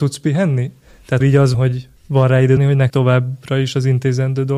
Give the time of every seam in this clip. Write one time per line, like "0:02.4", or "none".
0:01.2
0:01.5
0:02.0
0:02.6
0:02.9